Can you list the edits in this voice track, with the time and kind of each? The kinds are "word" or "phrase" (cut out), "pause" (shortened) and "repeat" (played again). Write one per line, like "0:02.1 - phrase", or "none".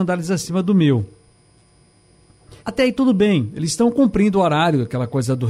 0:02.6 - pause

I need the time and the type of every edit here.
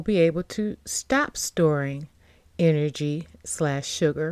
none

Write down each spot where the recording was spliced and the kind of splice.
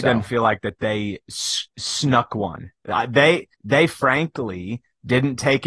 0:03.5 - pause

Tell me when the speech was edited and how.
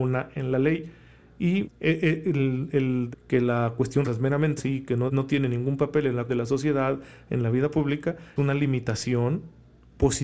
0:01.6 - word
0:03.1 - word
0:04.0 - word
0:04.6 - word
0:05.1 - word
0:06.3 - word
0:08.4 - word

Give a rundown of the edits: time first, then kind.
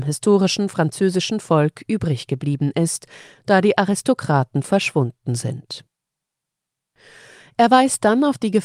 none

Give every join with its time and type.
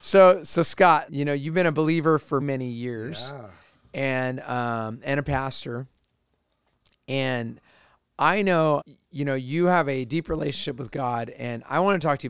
0:01.1 - word
0:02.4 - word
0:08.8 - word

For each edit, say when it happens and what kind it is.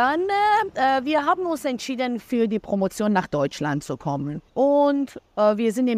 0:04.5 - pause

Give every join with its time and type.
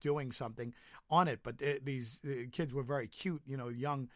none

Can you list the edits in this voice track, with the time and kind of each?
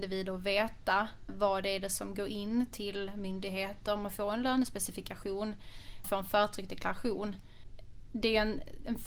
0:06.0 - word

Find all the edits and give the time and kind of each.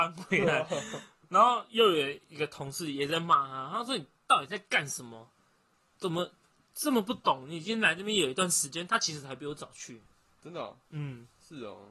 none

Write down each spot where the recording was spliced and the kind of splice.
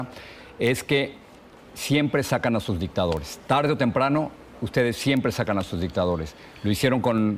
none

